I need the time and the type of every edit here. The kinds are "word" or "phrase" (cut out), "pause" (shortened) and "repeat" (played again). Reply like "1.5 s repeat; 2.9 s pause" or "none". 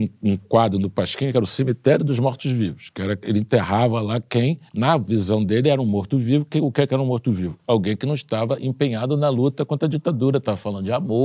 4.7 s pause